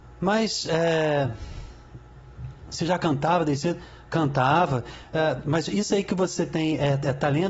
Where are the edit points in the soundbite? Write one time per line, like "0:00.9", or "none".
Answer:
none